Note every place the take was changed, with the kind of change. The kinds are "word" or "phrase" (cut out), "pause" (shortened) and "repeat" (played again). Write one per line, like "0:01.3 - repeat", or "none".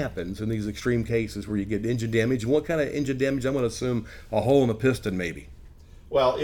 none